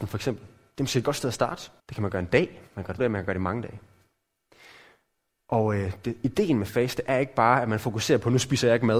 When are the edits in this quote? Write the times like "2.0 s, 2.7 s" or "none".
1.8 s, 2.7 s, 3.0 s